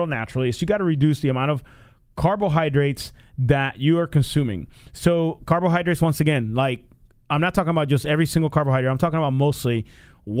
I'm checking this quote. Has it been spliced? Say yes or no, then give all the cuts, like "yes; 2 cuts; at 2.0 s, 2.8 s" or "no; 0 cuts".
no; 0 cuts